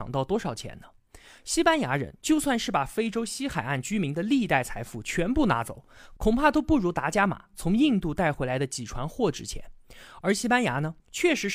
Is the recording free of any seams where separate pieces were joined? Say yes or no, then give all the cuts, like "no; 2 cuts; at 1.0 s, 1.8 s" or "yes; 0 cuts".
yes; 0 cuts